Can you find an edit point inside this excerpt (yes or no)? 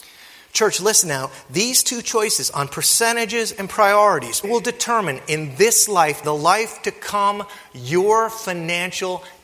yes